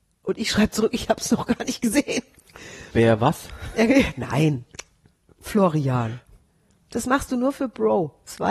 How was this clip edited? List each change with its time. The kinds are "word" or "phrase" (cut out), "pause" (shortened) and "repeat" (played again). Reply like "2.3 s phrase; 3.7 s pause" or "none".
none